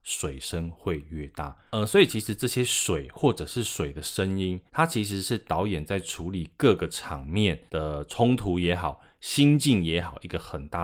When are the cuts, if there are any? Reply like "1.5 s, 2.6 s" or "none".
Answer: 1.7 s, 4.7 s, 7.7 s